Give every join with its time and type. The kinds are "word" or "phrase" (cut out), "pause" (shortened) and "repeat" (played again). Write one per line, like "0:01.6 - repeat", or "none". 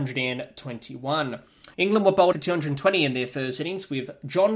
0:01.7 - pause
0:02.3 - word